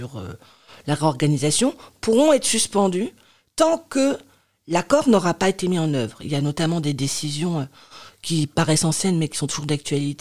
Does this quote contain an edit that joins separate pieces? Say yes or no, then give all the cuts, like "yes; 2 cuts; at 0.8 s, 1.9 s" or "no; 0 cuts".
no; 0 cuts